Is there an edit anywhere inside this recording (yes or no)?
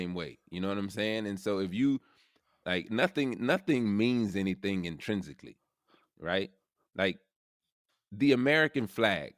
no